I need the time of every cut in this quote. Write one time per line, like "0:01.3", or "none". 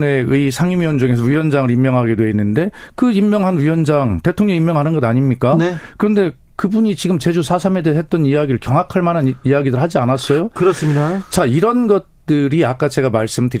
none